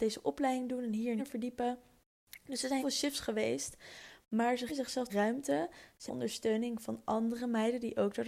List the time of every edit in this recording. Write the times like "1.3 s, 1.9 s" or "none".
1.2 s, 2.8 s, 4.7 s, 5.1 s, 6.1 s